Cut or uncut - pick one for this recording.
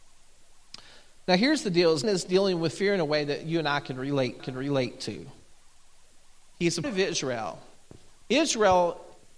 cut